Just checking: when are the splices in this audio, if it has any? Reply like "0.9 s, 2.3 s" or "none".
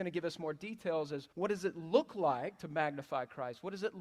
1.3 s